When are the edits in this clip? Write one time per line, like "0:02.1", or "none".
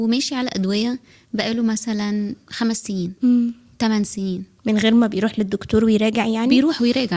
none